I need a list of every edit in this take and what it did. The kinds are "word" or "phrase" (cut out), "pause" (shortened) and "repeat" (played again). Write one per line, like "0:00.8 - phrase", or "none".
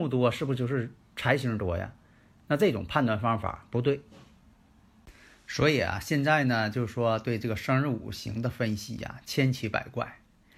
none